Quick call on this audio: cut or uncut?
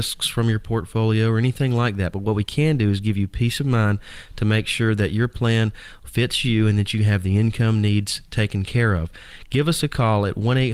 uncut